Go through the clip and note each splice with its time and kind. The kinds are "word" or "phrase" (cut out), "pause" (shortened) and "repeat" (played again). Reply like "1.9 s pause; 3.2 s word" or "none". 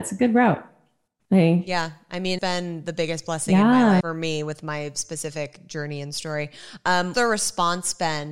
2.4 s word; 4.0 s word; 7.1 s word